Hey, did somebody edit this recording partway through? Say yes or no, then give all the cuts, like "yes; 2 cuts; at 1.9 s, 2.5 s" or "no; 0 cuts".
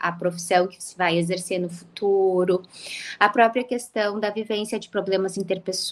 no; 0 cuts